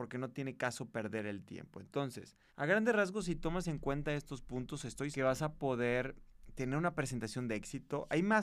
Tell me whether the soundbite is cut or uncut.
cut